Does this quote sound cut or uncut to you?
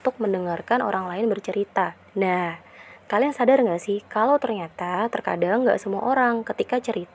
cut